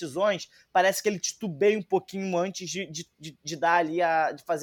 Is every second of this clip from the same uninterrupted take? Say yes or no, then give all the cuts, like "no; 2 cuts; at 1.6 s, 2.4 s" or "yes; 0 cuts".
yes; 0 cuts